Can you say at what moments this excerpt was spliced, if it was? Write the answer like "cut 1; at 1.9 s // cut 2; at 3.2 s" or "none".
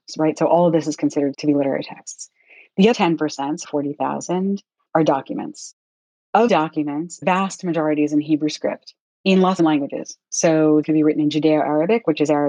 cut 1; at 1.3 s // cut 2; at 2.9 s // cut 3; at 3.6 s // cut 4; at 6.5 s // cut 5; at 7.2 s // cut 6; at 9.0 s // cut 7; at 9.6 s // cut 8; at 10.8 s